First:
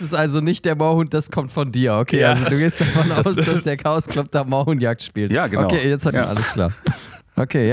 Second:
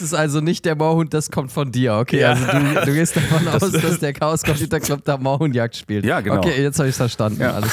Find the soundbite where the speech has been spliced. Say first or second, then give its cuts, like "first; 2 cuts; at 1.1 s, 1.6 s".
first; 3 cuts; at 2.5 s, 4.1 s, 6.1 s